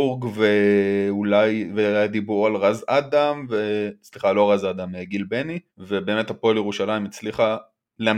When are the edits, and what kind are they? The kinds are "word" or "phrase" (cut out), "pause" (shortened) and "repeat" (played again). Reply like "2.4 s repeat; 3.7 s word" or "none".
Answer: 5.7 s pause